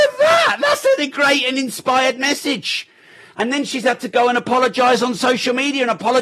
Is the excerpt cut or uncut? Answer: uncut